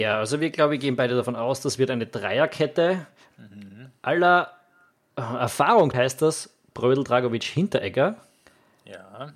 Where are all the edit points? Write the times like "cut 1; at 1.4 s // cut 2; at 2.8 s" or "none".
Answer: cut 1; at 5.9 s

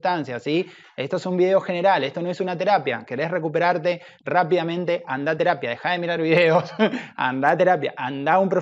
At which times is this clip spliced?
none

